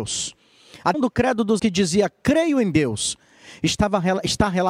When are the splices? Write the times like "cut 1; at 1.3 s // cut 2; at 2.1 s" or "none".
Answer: cut 1; at 0.9 s // cut 2; at 1.6 s